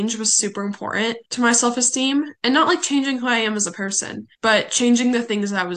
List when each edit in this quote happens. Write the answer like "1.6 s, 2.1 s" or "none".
1.3 s, 4.3 s